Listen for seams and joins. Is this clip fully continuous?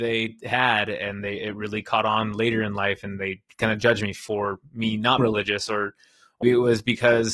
no; 2 cuts; at 5.2 s, 6.4 s

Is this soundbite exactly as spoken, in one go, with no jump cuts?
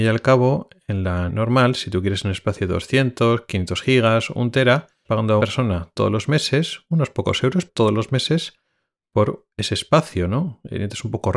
no; 4 cuts; at 1.3 s, 5.0 s, 5.4 s, 7.7 s

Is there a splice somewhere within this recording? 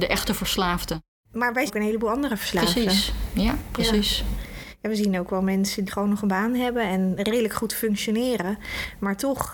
yes; 2 cuts; at 1.7 s, 5.9 s

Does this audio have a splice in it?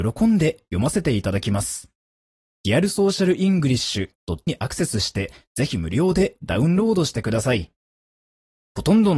yes; 1 cut; at 4.5 s

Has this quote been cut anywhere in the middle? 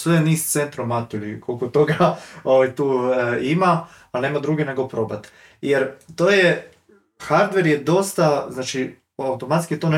no; 0 cuts

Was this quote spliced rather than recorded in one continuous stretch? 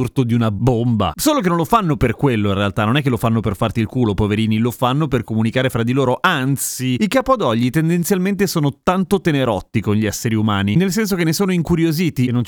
no; 0 cuts

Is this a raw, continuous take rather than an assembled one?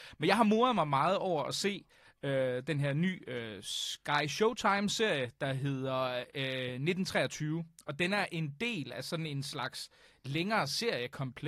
yes; 0 cuts

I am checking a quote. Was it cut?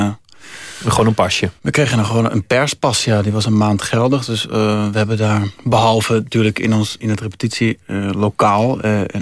yes; 3 cuts; at 1.6 s, 5.6 s, 7.0 s

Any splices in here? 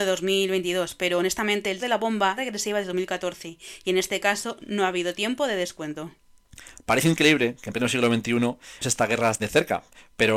yes; 4 cuts; at 1.8 s, 2.4 s, 8.8 s, 9.4 s

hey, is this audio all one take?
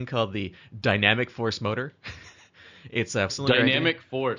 no; 1 cut; at 3.3 s

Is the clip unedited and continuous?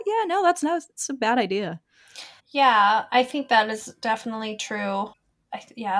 no; 1 cut; at 2.4 s

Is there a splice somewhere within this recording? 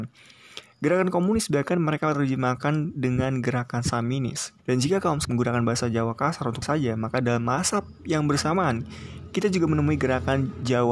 yes; 3 cuts; at 4.6 s, 5.2 s, 6.6 s

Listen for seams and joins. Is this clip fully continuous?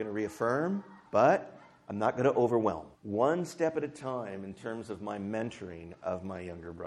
no; 2 cuts; at 1.1 s, 3.0 s

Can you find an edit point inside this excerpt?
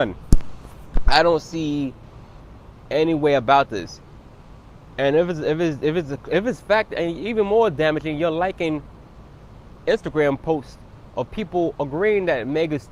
no; 0 cuts

